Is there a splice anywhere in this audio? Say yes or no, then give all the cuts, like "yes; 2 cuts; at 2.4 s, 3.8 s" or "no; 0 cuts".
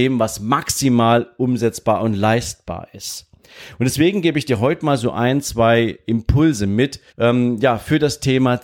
yes; 1 cut; at 7.1 s